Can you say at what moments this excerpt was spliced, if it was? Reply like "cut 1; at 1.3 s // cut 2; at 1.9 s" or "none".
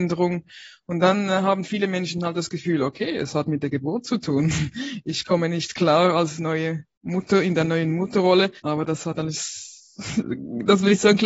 cut 1; at 8.6 s